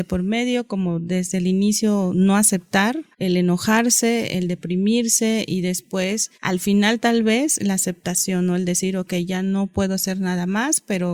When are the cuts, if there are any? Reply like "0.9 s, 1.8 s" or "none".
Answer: 3.1 s, 6.3 s